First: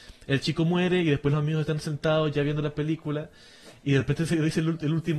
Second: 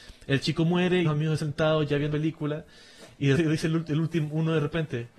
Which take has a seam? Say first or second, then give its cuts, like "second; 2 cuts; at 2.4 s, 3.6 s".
second; 4 cuts; at 1.0 s, 1.4 s, 2.1 s, 3.4 s